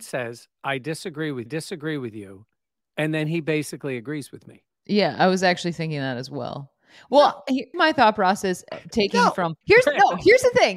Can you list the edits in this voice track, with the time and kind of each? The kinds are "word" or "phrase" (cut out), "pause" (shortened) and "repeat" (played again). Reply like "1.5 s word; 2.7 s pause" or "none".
1.5 s repeat; 7.7 s word; 9.6 s pause